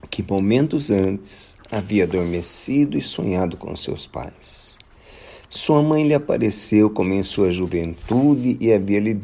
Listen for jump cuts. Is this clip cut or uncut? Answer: uncut